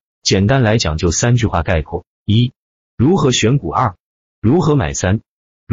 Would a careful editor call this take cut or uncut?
uncut